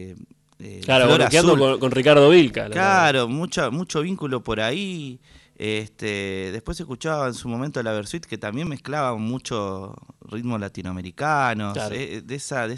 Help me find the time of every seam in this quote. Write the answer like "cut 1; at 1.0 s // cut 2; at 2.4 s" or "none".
none

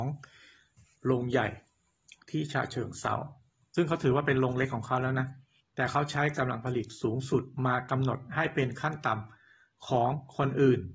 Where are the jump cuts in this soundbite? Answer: cut 1; at 5.6 s

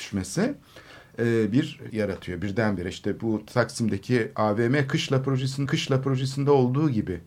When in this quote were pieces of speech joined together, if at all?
cut 1; at 1.9 s // cut 2; at 5.7 s

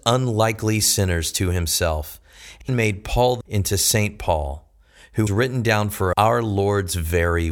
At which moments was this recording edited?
cut 1; at 2.7 s // cut 2; at 3.4 s // cut 3; at 5.3 s // cut 4; at 6.1 s

